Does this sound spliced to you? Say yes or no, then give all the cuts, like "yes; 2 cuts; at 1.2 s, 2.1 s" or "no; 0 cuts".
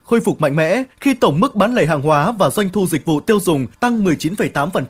yes; 2 cuts; at 0.9 s, 3.7 s